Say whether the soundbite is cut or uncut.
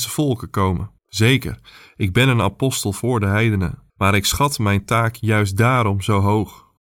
cut